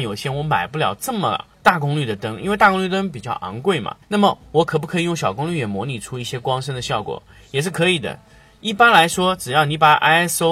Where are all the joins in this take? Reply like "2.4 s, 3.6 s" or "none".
1.5 s, 4.0 s